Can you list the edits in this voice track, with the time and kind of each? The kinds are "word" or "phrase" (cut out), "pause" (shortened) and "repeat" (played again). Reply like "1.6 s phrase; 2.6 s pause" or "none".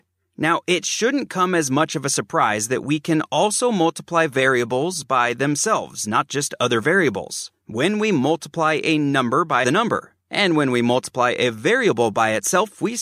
9.6 s phrase